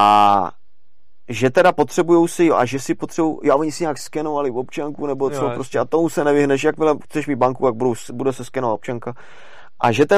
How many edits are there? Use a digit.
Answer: 0